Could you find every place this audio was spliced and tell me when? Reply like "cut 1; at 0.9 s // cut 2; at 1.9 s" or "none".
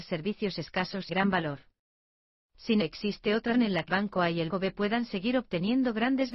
cut 1; at 1.1 s // cut 2; at 2.8 s // cut 3; at 3.5 s // cut 4; at 3.9 s // cut 5; at 4.5 s